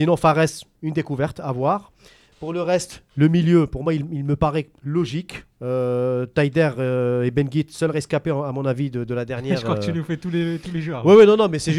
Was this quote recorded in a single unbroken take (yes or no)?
yes